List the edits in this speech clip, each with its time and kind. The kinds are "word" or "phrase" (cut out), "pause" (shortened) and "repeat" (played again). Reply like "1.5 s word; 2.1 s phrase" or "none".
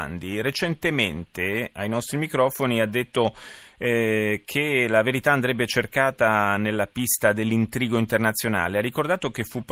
none